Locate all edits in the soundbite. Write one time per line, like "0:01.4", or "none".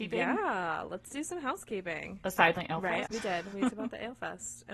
0:02.6
0:03.1
0:03.7